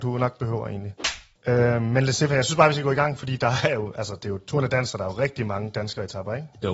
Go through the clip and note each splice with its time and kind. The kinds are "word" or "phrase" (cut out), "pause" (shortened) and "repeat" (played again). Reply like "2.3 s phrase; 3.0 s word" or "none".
none